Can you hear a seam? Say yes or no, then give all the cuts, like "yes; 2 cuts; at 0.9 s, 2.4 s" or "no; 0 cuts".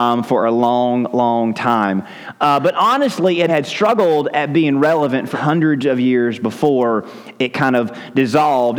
yes; 2 cuts; at 3.5 s, 5.3 s